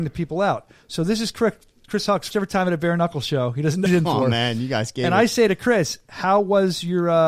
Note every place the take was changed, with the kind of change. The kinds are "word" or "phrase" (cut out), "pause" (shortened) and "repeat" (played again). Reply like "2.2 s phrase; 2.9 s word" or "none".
2.3 s word; 3.9 s word